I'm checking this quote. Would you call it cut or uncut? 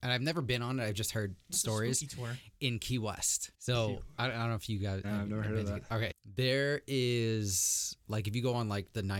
cut